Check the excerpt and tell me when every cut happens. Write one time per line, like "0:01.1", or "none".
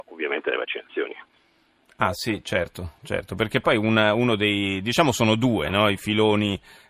none